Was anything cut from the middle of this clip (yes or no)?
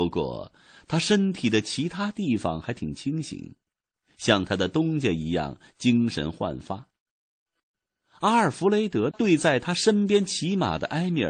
no